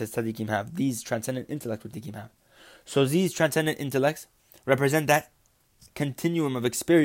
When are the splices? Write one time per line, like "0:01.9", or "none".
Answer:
0:01.9
0:04.4